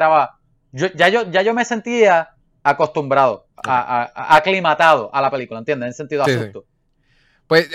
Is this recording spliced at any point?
yes; 1 cut; at 3.5 s

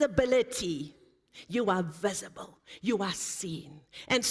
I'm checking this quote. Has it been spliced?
no; 0 cuts

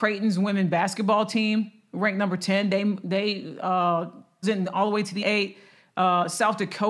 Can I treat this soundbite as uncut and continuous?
no; 2 cuts; at 4.4 s, 5.2 s

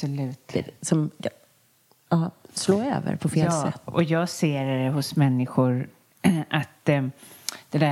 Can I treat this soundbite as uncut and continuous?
yes; 0 cuts

